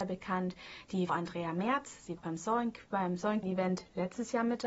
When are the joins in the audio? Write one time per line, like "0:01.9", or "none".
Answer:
0:01.1
0:02.2
0:03.4

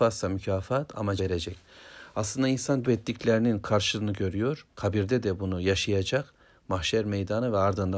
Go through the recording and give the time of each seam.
0:01.2
0:02.8
0:04.7

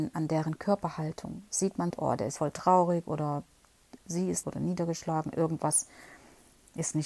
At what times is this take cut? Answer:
0:01.9
0:02.4
0:04.4

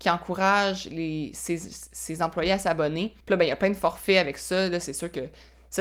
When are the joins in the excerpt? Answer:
0:03.2

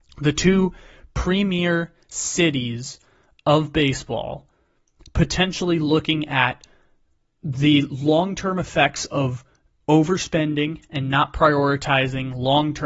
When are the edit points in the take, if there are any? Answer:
none

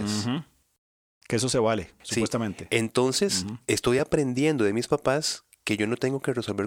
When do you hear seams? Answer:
none

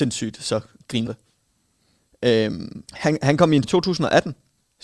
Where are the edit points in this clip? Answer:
0:01.1
0:02.9
0:03.6

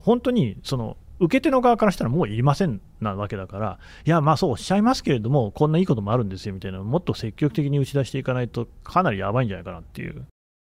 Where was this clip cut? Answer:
none

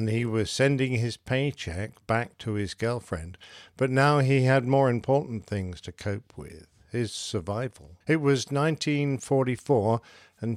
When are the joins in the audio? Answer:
0:08.0

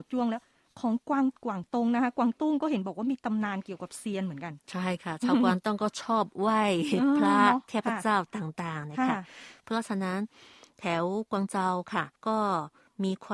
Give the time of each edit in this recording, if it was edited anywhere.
0:01.4
0:12.2

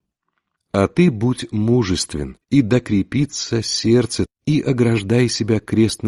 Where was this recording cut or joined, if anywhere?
0:02.4
0:04.3

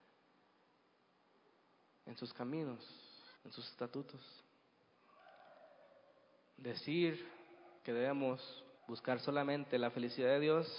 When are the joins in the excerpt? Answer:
0:03.4
0:07.8
0:08.8

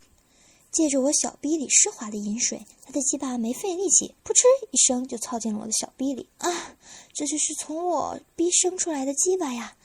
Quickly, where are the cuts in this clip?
0:02.7
0:04.2
0:06.3

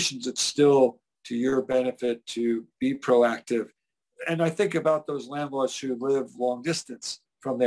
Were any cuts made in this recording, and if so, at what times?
none

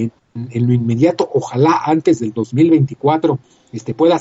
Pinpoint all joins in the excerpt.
none

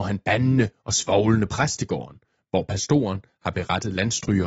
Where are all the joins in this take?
none

